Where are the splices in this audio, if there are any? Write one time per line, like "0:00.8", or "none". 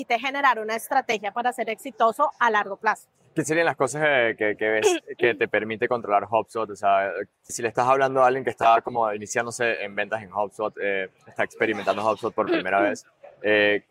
0:07.5

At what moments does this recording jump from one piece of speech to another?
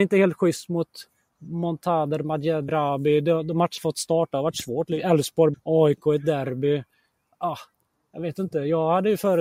0:02.7
0:03.8
0:05.5

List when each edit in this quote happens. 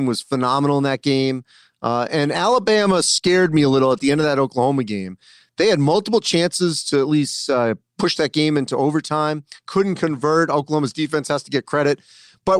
0:09.6

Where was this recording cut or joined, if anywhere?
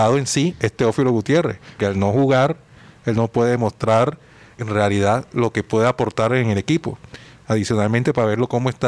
0:01.8
0:04.6

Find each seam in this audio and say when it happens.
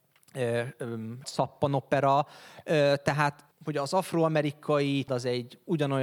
0:01.2
0:03.5
0:05.1

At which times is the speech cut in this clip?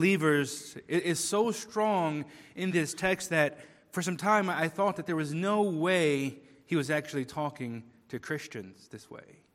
none

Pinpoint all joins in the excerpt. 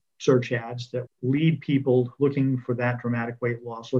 0:01.1

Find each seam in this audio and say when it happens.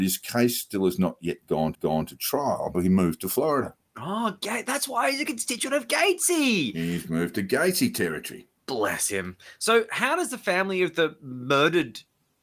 0:01.7
0:02.7

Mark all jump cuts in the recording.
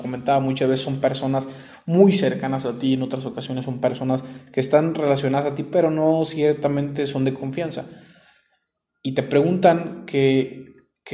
none

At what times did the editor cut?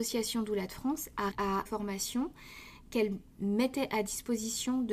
0:01.3
0:01.7

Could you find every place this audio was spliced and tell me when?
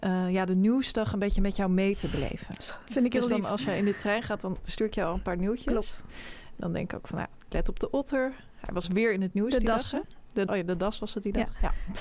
0:10.5

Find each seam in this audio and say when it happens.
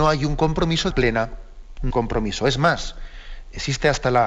0:00.9
0:01.9

